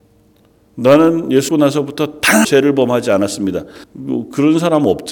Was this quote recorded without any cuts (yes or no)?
no